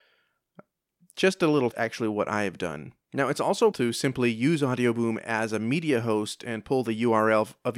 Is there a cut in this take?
yes; 3 cuts; at 1.7 s, 3.0 s, 3.7 s

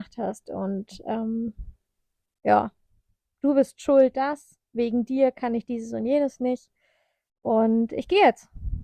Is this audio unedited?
yes; 0 cuts

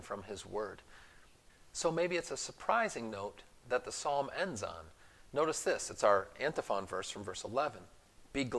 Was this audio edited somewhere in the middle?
no; 0 cuts

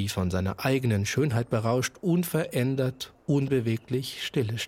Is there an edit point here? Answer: no; 0 cuts

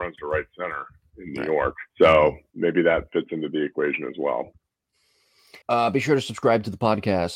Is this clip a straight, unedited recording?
no; 2 cuts; at 1.9 s, 5.6 s

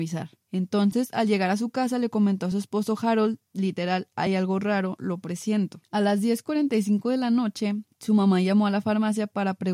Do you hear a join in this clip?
no; 0 cuts

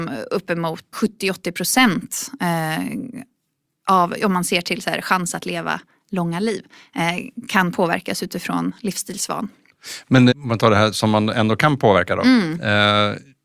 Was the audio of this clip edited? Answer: yes; 2 cuts; at 0.9 s, 10.3 s

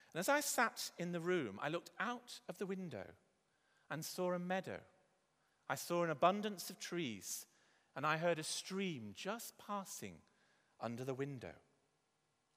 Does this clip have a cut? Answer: no; 0 cuts

